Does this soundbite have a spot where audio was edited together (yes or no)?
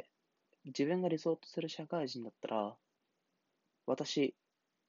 no